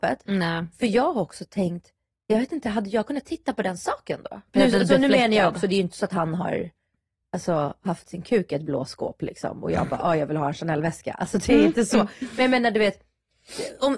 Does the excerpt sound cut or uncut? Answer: cut